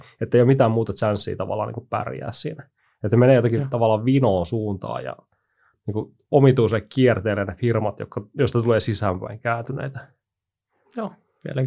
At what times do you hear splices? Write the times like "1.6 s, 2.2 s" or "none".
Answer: 2.8 s